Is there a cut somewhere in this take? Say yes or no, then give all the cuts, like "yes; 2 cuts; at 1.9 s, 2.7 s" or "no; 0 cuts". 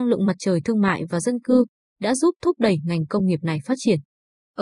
no; 0 cuts